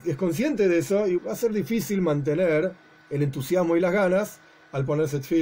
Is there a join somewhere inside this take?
yes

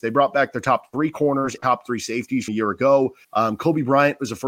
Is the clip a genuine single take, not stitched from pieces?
no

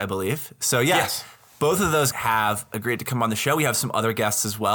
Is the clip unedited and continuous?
no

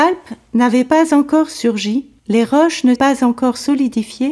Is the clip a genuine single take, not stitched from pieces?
no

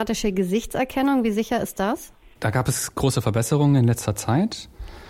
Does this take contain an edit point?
no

